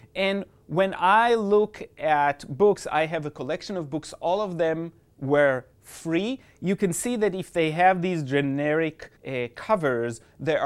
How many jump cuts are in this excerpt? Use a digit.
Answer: 1